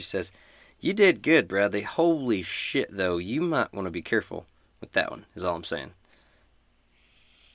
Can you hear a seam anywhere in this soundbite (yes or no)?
no